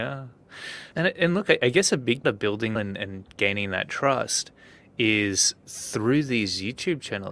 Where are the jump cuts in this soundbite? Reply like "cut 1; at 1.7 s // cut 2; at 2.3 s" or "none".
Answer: cut 1; at 0.9 s // cut 2; at 2.2 s // cut 3; at 2.7 s // cut 4; at 5.6 s